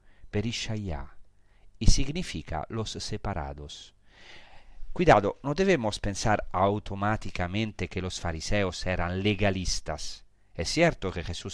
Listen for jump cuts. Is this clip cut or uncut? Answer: uncut